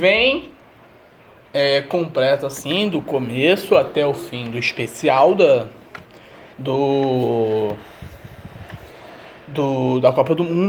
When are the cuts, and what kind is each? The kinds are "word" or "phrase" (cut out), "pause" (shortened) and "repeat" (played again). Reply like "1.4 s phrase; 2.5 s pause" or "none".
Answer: 6.5 s pause